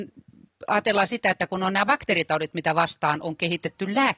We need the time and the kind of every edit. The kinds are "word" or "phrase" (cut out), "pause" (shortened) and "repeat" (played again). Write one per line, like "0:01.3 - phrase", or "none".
none